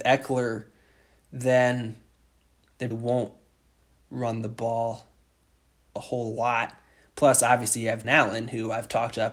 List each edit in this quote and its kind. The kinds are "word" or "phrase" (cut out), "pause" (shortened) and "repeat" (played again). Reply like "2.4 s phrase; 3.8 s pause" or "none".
2.9 s word; 8.0 s word